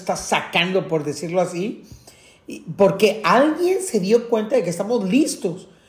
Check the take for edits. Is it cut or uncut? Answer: uncut